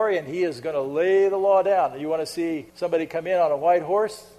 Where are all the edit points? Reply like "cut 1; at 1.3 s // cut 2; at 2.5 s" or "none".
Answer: cut 1; at 2.7 s